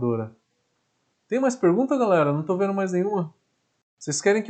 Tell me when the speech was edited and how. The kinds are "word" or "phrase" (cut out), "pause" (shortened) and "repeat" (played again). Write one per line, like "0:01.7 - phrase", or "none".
none